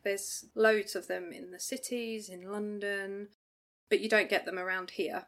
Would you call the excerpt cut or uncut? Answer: uncut